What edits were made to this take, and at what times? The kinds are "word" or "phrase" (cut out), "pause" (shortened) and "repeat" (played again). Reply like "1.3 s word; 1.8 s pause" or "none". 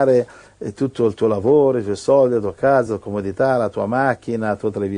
none